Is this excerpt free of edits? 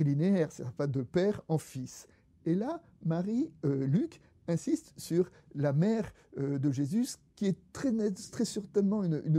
yes; 0 cuts

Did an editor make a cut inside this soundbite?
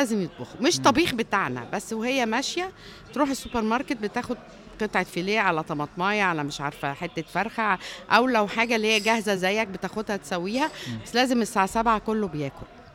no; 0 cuts

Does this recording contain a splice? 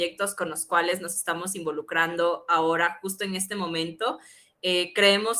no; 0 cuts

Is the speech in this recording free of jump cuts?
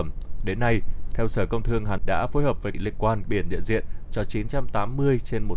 no; 3 cuts; at 2.0 s, 2.7 s, 3.2 s

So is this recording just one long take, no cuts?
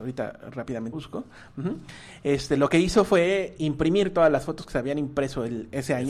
no; 2 cuts; at 0.9 s, 3.6 s

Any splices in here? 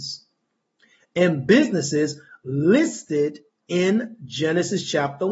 no; 0 cuts

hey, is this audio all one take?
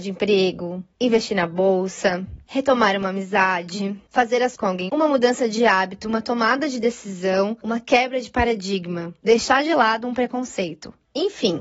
no; 2 cuts; at 4.6 s, 4.9 s

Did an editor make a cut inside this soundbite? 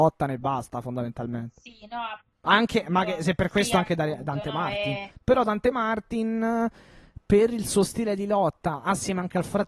yes; 1 cut; at 5.2 s

